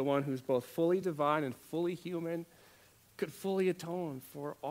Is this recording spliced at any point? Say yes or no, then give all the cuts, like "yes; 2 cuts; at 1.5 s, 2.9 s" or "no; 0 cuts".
no; 0 cuts